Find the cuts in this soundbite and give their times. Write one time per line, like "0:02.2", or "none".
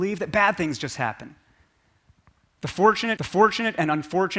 0:03.2